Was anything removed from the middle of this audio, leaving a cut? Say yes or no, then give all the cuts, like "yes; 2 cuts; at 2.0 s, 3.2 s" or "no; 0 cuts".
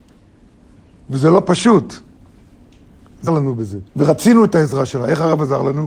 yes; 2 cuts; at 3.3 s, 3.9 s